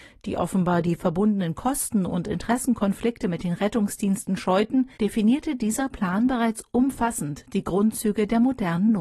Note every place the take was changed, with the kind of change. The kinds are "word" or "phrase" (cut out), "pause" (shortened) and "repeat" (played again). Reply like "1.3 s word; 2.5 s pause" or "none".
4.9 s pause